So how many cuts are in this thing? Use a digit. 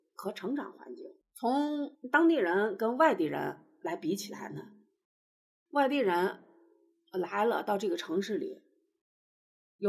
0